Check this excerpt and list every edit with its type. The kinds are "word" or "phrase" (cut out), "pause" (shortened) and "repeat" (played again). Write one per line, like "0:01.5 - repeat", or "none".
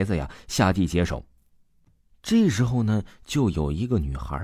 none